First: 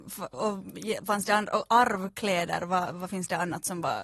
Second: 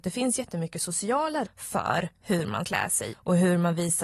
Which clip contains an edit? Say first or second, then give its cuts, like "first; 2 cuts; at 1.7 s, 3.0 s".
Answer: second; 3 cuts; at 1.5 s, 2.6 s, 3.1 s